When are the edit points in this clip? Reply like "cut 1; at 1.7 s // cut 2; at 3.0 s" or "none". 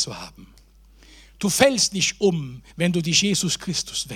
cut 1; at 2.7 s